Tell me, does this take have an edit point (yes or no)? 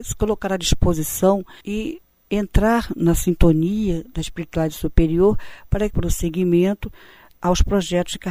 yes